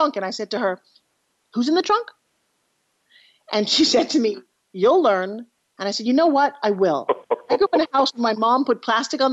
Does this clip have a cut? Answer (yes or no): no